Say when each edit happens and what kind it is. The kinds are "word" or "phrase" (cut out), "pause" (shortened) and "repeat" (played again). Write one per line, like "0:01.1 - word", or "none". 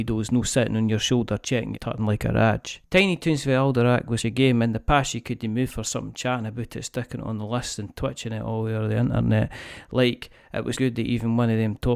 0:01.7 - phrase
0:04.2 - word
0:10.7 - word